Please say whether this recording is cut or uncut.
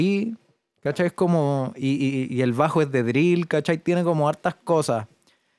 uncut